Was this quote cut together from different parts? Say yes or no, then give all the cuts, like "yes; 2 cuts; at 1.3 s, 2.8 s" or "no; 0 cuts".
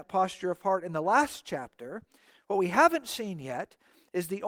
no; 0 cuts